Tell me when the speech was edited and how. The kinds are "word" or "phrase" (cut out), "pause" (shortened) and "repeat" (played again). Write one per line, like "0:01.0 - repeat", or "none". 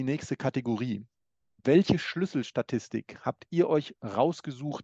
none